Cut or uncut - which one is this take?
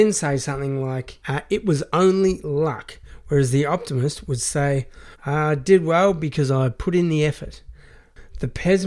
cut